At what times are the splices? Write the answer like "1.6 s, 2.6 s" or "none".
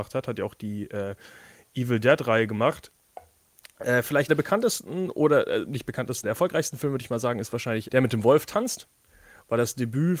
4.3 s, 6.2 s, 7.9 s